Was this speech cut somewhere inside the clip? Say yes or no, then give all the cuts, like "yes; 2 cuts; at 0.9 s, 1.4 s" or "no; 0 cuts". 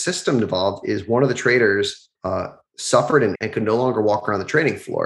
yes; 2 cuts; at 2.1 s, 3.3 s